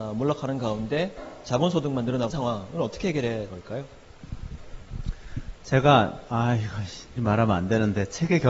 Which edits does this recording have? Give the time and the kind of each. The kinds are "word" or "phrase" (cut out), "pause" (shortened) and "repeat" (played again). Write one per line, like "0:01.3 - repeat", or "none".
0:02.3 - word
0:03.5 - word
0:07.2 - word